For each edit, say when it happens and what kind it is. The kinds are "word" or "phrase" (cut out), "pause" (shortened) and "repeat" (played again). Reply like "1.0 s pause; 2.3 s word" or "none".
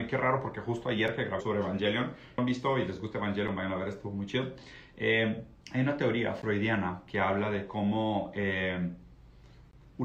1.4 s phrase; 2.4 s phrase; 5.6 s pause